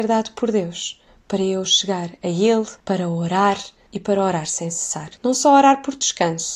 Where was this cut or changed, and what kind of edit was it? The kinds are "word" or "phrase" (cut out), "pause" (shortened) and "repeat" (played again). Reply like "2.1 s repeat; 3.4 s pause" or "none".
1.1 s pause; 2.8 s pause; 5.2 s pause